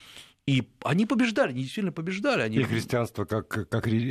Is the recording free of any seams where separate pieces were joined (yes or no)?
yes